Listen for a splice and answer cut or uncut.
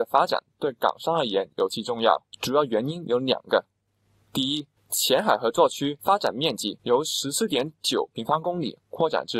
cut